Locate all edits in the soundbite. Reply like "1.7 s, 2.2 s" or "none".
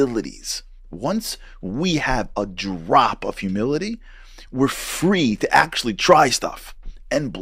none